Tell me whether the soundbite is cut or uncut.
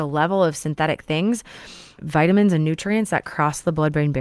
cut